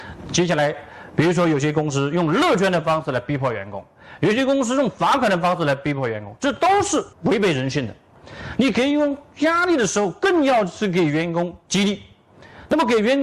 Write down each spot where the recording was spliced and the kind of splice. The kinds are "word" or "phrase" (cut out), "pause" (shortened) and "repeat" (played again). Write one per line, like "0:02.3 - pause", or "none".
0:07.1 - pause